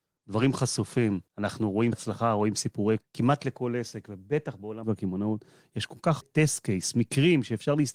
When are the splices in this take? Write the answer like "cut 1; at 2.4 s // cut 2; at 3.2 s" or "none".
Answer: cut 1; at 1.3 s // cut 2; at 1.9 s // cut 3; at 3.0 s // cut 4; at 4.8 s // cut 5; at 6.2 s